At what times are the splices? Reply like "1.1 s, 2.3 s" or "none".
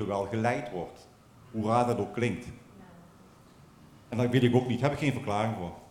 none